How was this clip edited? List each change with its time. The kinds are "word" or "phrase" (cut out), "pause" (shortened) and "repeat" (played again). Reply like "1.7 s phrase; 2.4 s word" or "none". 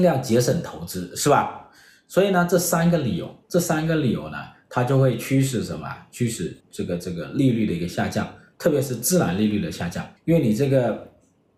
3.4 s pause; 6.6 s pause; 10.2 s pause